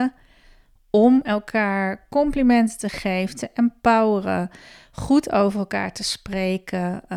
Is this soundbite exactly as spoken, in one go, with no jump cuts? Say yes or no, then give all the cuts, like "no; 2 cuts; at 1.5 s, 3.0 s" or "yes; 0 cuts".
yes; 0 cuts